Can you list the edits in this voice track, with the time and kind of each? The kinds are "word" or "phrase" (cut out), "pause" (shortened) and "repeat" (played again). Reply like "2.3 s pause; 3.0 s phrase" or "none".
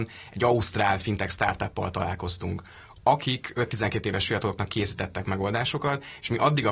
none